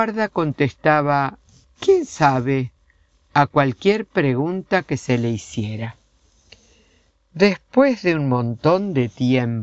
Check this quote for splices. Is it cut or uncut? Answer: uncut